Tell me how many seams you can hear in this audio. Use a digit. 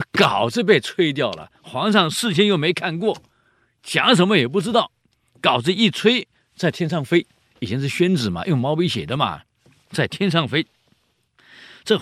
0